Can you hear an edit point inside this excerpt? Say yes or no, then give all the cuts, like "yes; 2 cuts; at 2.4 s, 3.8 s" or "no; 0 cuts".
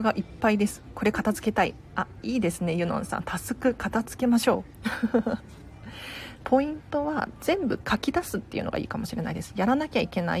yes; 1 cut; at 6.4 s